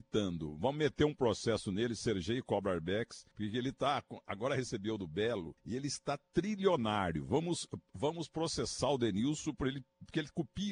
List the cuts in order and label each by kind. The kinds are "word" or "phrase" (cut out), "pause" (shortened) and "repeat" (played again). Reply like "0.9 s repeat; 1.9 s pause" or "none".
3.3 s pause; 5.6 s pause